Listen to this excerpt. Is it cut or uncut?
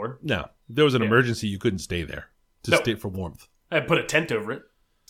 uncut